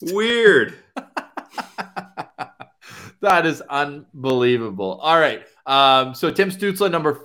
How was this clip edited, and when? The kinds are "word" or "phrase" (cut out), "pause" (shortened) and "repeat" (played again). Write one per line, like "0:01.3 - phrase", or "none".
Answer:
none